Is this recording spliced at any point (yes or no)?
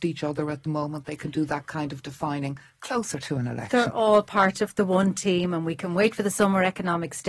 no